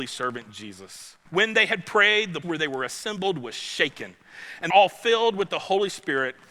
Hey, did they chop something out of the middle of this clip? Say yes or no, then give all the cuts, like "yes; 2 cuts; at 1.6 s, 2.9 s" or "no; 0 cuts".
yes; 3 cuts; at 1.3 s, 2.4 s, 4.7 s